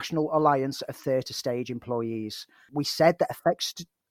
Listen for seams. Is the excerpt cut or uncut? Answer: uncut